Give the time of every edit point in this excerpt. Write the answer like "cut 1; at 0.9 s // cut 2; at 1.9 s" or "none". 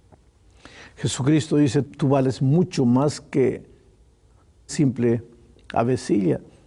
cut 1; at 1.8 s // cut 2; at 4.7 s